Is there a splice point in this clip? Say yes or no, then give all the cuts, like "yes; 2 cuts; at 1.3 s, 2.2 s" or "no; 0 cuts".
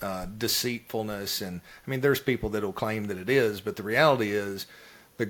no; 0 cuts